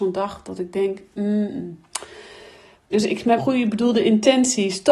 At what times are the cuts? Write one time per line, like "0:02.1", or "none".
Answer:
0:02.9
0:03.4